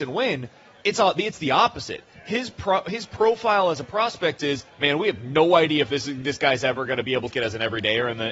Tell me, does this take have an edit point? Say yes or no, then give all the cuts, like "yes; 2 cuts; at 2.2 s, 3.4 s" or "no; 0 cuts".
yes; 2 cuts; at 4.7 s, 7.3 s